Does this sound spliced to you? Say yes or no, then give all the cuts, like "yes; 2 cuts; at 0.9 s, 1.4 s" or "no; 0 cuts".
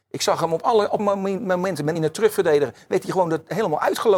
yes; 2 cuts; at 1.0 s, 2.0 s